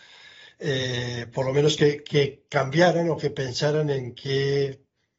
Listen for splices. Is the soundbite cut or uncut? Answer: uncut